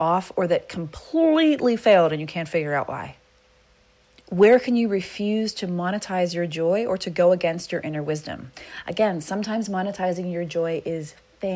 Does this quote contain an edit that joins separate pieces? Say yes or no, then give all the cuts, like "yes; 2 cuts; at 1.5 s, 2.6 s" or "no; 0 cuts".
yes; 1 cut; at 3.8 s